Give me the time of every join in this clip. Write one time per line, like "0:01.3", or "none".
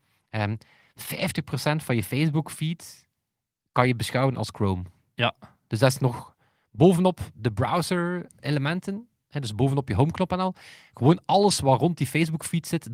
none